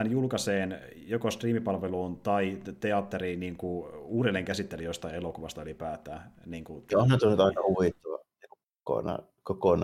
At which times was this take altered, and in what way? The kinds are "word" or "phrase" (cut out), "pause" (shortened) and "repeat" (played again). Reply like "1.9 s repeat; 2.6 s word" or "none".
none